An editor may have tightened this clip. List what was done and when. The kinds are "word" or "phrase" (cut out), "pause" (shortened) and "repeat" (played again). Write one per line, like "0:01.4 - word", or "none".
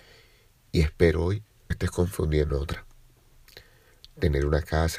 0:01.7 - word
0:02.5 - phrase